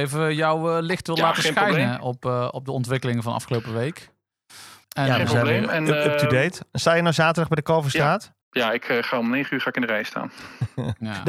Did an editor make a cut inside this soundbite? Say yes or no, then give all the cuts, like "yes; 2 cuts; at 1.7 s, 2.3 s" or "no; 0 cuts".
yes; 2 cuts; at 4.8 s, 8.4 s